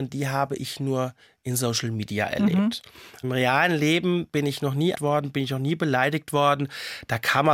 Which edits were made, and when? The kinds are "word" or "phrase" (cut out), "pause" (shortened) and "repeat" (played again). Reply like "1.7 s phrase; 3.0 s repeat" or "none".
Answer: 4.9 s word